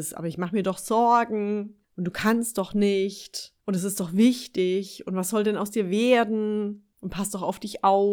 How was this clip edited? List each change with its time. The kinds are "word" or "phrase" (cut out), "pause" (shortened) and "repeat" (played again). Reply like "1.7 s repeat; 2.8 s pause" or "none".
1.8 s pause; 3.6 s pause; 6.9 s pause